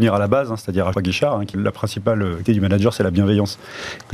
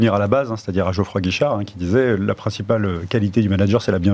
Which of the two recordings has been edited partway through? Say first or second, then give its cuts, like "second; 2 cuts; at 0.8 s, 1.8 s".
first; 3 cuts; at 0.9 s, 1.5 s, 2.5 s